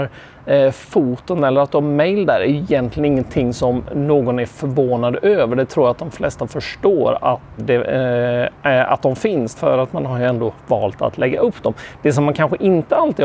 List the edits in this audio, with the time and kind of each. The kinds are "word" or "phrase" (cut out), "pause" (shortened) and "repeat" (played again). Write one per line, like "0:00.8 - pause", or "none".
0:07.6 - word
0:08.6 - pause
0:09.5 - word

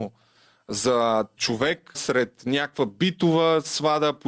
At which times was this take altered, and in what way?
0:01.4 - word
0:01.9 - word

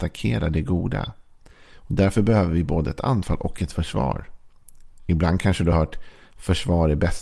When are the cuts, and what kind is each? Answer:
none

